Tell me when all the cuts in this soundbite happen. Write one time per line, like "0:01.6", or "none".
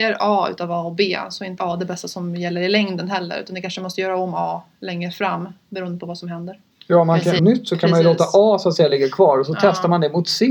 0:01.6
0:07.4